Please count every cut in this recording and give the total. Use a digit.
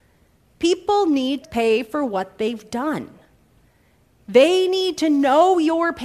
1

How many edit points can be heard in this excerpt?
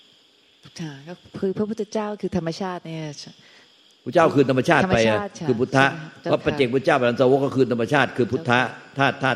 0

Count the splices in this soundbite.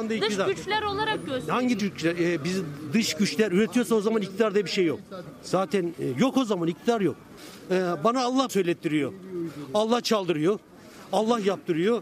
2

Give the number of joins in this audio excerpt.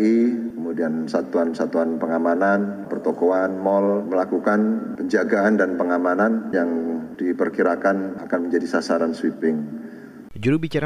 3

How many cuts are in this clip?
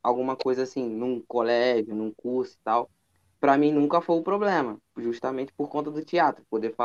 1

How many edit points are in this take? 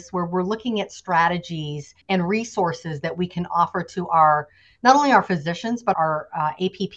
2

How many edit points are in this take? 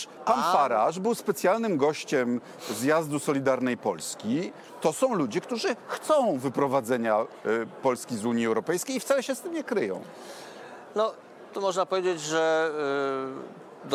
0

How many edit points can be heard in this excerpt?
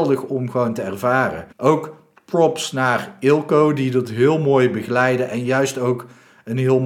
1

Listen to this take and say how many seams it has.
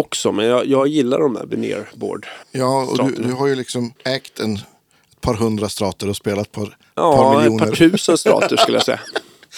2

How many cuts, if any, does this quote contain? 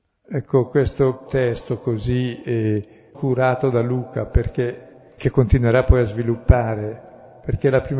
3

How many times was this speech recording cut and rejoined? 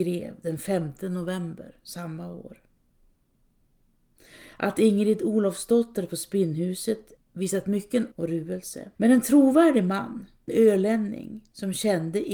4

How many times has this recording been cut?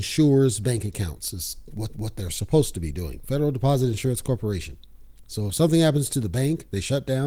1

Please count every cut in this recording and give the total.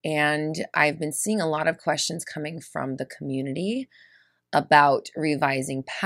0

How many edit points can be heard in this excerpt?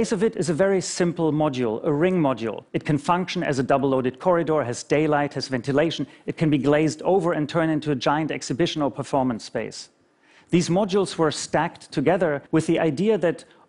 2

